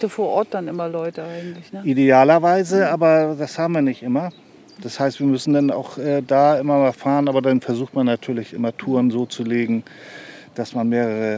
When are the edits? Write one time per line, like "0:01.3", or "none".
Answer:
none